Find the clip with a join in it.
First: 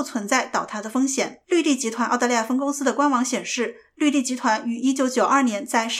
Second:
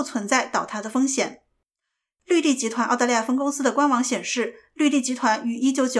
first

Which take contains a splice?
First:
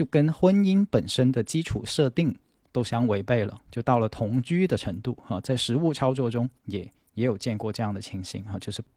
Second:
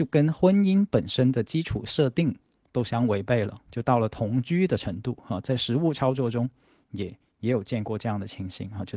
first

